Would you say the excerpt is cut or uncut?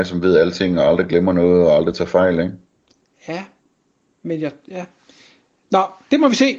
uncut